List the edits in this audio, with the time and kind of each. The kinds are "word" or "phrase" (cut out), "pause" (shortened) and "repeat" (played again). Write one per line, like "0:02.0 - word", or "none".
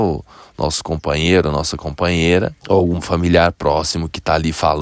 0:02.6 - pause